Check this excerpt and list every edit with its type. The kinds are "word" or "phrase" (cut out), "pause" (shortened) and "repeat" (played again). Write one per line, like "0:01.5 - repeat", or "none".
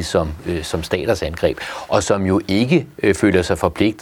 none

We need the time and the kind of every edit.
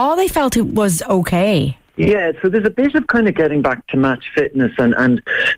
0:01.9 - pause

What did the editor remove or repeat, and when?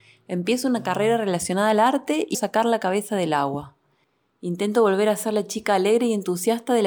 0:02.3 - word

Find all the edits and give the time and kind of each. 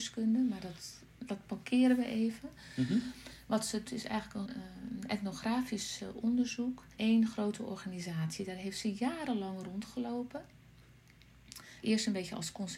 0:01.1 - pause
0:03.8 - word
0:04.4 - word
0:07.0 - word
0:11.8 - word

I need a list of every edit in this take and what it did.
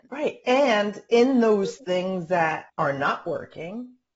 0:02.7 - pause

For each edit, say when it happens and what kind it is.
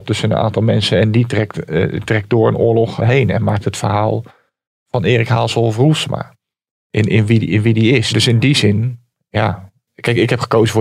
0:03.0 - word

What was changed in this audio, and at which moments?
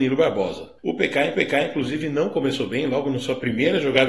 0:01.3 - repeat

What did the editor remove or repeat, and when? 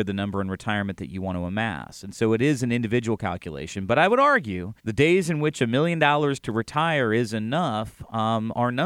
0:04.8 - pause

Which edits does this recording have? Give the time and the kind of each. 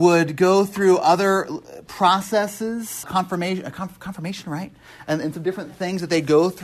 0:03.0 - word

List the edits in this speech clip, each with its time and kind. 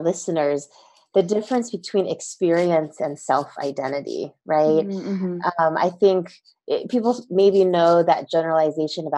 none

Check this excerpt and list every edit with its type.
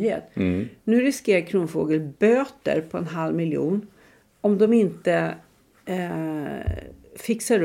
none

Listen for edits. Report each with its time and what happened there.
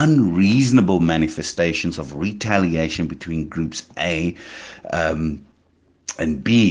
none

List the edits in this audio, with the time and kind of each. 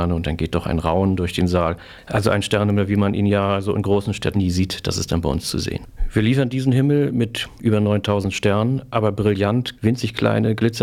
0:04.3 - word
0:09.8 - word

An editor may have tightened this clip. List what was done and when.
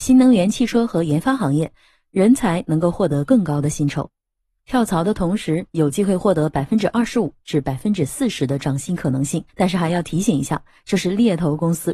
0:09.5 - pause

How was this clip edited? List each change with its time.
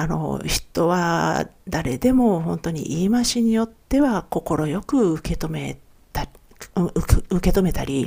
none

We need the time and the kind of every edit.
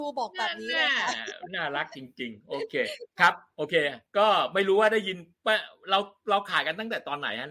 0:04.1 - pause

